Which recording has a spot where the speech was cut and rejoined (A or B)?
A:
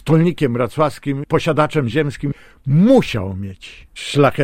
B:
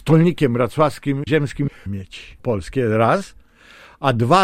B